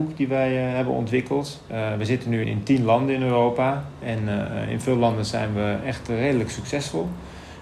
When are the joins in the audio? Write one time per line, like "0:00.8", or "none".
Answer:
0:02.4